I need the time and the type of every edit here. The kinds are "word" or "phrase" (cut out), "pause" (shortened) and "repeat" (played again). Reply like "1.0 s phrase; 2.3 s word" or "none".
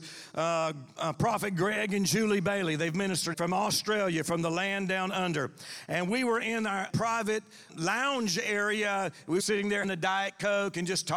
3.3 s word; 6.9 s word; 7.7 s word; 9.4 s word; 9.8 s word